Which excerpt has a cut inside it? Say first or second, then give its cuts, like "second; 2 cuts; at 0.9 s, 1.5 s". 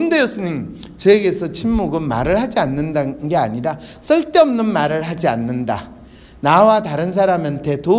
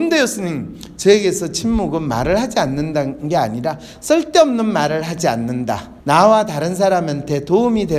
second; 1 cut; at 6.0 s